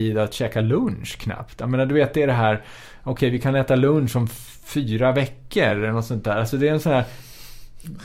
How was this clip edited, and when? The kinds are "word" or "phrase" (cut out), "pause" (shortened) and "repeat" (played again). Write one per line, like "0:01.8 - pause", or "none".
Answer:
none